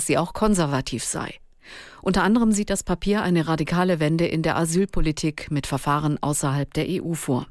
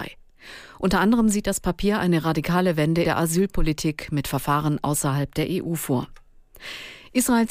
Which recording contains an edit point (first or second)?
second